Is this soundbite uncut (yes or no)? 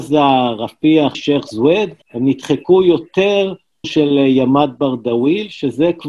no